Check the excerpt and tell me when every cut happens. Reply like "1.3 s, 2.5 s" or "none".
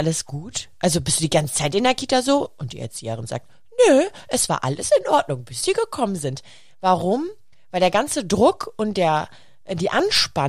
none